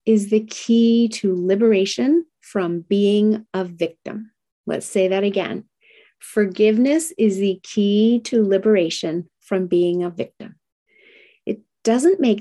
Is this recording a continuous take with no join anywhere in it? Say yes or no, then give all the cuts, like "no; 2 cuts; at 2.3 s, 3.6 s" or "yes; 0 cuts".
no; 1 cut; at 4.5 s